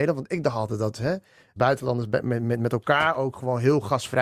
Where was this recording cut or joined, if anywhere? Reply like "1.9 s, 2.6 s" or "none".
1.6 s